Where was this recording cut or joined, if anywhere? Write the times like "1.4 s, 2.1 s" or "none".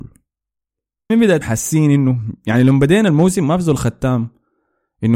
1.1 s, 1.4 s